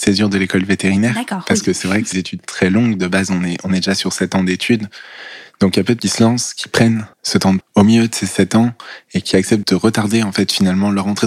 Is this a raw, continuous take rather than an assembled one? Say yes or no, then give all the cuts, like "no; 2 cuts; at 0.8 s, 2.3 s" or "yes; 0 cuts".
no; 5 cuts; at 2.1 s, 6.0 s, 7.1 s, 7.6 s, 9.6 s